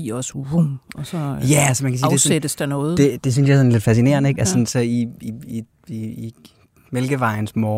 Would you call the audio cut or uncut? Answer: uncut